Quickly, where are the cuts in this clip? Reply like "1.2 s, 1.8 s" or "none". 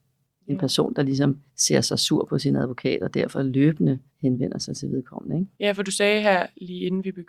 1.5 s, 4.1 s, 5.5 s